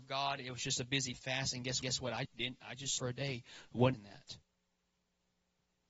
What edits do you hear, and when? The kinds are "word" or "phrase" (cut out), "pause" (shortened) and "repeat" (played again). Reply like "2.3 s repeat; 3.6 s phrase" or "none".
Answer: 1.1 s phrase; 1.8 s repeat; 2.2 s word; 3.0 s phrase; 3.9 s phrase